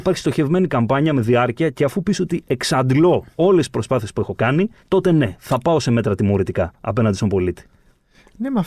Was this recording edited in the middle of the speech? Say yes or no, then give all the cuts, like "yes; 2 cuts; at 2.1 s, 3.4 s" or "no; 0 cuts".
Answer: yes; 2 cuts; at 3.3 s, 4.8 s